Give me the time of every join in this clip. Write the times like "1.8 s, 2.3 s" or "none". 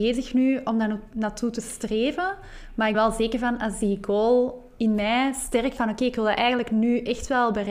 2.9 s, 5.8 s